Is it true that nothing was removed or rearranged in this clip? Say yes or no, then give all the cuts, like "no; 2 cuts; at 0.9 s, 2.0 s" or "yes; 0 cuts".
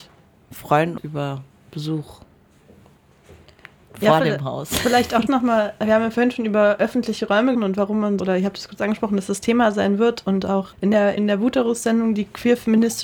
no; 6 cuts; at 1.0 s, 5.3 s, 7.5 s, 8.2 s, 10.7 s, 11.2 s